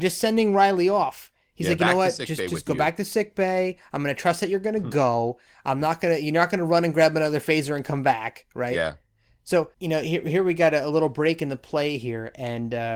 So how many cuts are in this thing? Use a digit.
1